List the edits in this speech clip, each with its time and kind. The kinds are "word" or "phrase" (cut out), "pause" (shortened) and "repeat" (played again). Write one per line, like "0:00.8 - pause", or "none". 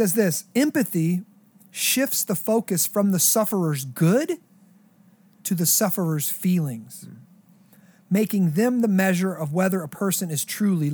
none